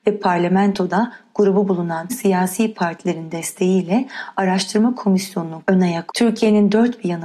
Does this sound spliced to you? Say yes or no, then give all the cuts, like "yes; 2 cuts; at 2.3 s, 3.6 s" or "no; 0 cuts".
yes; 3 cuts; at 2.1 s, 5.6 s, 6.1 s